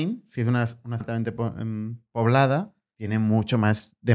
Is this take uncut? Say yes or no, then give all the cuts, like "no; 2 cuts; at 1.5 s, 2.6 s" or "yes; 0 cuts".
no; 2 cuts; at 1.0 s, 2.9 s